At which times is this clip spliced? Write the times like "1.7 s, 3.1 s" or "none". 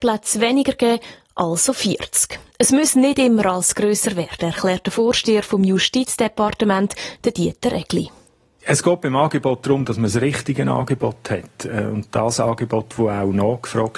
none